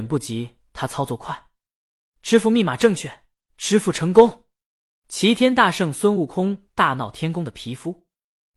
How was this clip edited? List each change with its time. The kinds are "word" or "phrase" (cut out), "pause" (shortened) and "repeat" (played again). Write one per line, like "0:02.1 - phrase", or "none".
0:03.4 - pause